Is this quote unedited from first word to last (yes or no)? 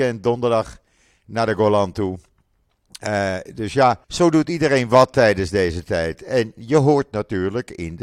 no